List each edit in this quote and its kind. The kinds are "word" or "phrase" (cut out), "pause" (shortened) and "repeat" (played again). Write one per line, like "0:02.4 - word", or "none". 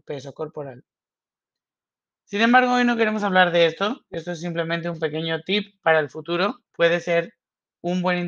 0:06.7 - pause